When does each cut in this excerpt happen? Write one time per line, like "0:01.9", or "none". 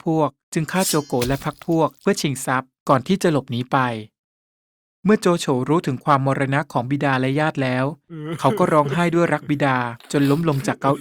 none